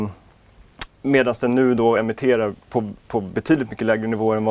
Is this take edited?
no; 0 cuts

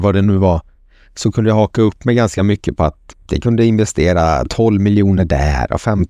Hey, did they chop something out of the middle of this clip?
no; 0 cuts

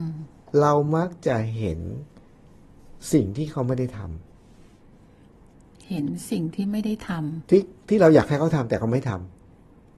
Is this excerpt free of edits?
yes; 0 cuts

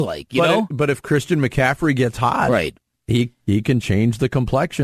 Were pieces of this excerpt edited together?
no; 0 cuts

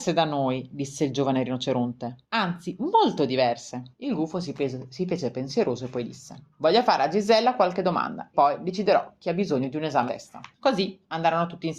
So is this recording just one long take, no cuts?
no; 6 cuts; at 2.2 s, 3.9 s, 6.5 s, 8.3 s, 10.1 s, 10.5 s

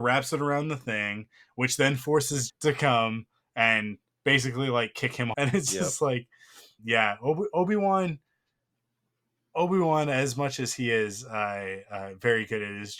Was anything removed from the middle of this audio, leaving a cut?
yes; 3 cuts; at 2.5 s, 5.3 s, 6.8 s

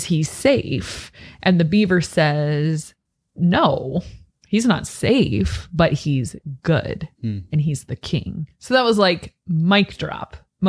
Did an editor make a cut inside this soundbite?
no; 0 cuts

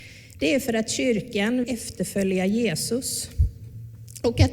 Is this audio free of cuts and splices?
no; 1 cut; at 1.6 s

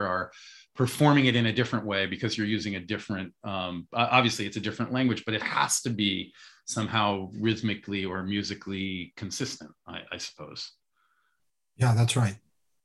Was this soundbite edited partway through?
no; 0 cuts

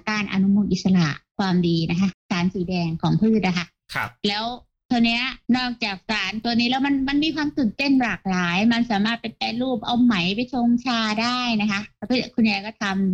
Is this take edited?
yes; 1 cut; at 5.4 s

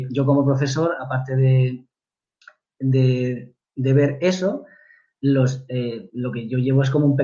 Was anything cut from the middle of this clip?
no; 0 cuts

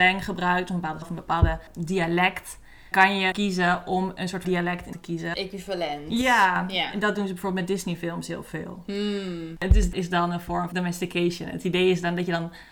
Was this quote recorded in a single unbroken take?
no; 8 cuts; at 1.0 s, 2.9 s, 3.3 s, 4.4 s, 4.9 s, 5.3 s, 9.9 s, 10.7 s

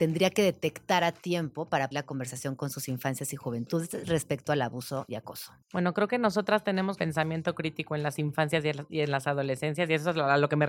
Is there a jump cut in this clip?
yes; 3 cuts; at 1.9 s, 5.6 s, 7.0 s

